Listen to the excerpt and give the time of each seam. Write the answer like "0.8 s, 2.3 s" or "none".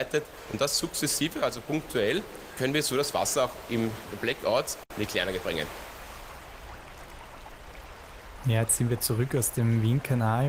none